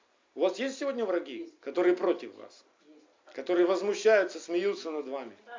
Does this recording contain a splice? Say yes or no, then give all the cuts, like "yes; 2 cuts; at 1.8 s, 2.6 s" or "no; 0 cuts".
no; 0 cuts